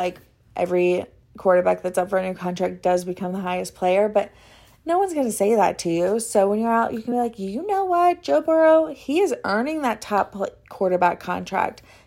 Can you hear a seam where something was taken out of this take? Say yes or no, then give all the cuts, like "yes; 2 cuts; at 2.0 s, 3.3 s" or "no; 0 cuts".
no; 0 cuts